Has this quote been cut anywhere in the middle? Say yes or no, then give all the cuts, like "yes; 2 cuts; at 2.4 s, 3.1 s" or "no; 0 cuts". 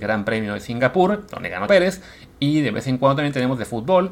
yes; 1 cut; at 1.7 s